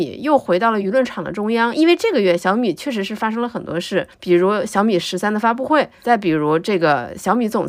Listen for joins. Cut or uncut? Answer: cut